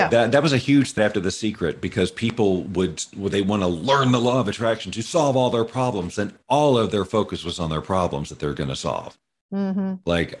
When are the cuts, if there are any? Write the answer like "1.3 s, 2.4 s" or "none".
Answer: 1.0 s